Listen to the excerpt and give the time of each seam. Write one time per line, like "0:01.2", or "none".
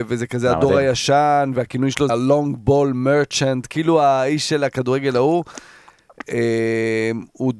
0:02.1